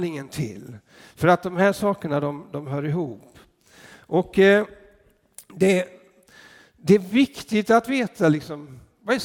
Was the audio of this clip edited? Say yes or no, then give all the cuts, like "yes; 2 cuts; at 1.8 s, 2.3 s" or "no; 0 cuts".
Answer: no; 0 cuts